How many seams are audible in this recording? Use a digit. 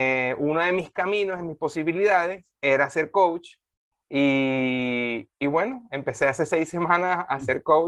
0